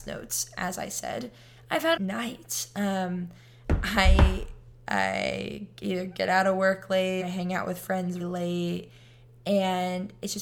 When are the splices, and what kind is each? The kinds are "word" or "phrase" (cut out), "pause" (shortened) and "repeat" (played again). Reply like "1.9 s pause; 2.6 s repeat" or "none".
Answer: 2.0 s phrase; 7.2 s word; 8.2 s word